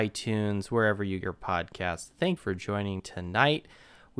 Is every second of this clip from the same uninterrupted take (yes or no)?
no